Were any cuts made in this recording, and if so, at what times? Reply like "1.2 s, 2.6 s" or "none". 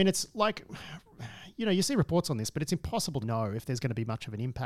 3.2 s